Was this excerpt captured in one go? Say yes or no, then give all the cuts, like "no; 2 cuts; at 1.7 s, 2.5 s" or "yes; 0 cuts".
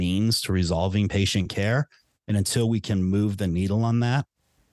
yes; 0 cuts